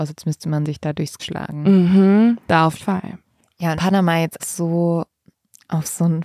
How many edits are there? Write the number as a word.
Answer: four